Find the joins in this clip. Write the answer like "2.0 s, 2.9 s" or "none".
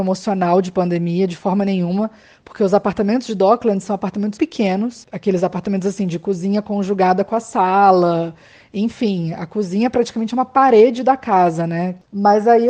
4.4 s